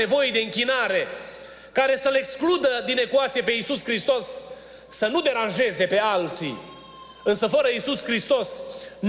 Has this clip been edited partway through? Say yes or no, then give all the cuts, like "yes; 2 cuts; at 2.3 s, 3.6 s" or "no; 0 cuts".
no; 0 cuts